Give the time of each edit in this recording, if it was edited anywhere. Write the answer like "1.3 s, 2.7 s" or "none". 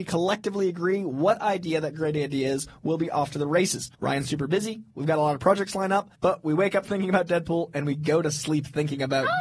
3.9 s, 6.1 s